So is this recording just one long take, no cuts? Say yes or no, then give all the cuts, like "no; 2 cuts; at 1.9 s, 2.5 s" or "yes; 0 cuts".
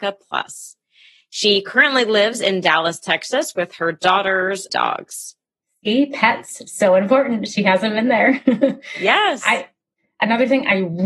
no; 1 cut; at 4.7 s